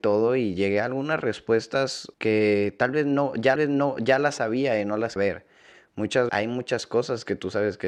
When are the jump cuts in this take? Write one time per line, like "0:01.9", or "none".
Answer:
0:02.1
0:03.6
0:05.2
0:06.3